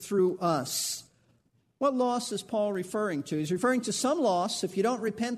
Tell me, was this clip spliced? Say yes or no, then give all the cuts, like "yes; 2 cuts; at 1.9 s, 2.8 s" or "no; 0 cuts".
no; 0 cuts